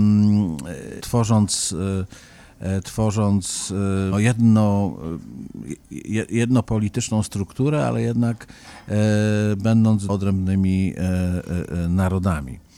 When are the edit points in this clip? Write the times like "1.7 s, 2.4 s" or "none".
1.0 s, 4.1 s, 6.6 s, 10.1 s